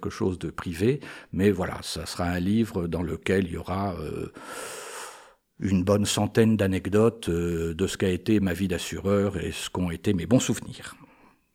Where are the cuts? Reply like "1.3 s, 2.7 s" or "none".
none